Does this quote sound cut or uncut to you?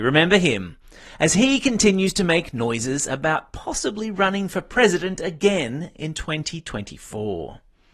uncut